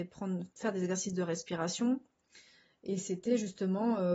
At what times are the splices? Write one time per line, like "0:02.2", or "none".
none